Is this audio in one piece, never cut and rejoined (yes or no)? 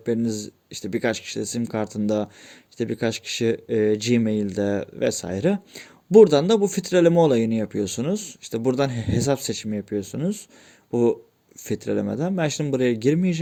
yes